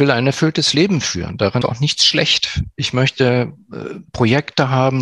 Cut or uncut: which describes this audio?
cut